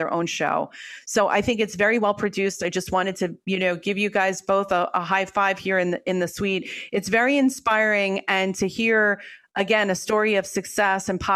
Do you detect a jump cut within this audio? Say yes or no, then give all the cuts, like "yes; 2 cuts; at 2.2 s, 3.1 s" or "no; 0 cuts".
no; 0 cuts